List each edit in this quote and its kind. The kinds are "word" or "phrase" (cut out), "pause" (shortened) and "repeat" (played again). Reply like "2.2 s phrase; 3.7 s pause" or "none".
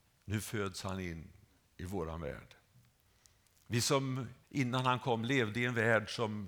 4.4 s pause